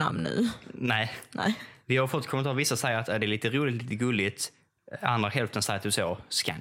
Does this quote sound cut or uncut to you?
uncut